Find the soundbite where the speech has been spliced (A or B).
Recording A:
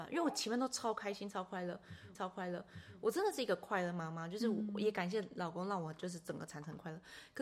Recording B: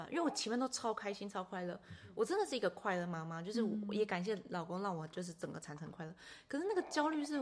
A